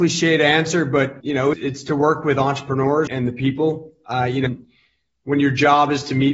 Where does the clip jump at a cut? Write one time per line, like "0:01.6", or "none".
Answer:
0:01.2
0:01.5
0:03.1
0:04.5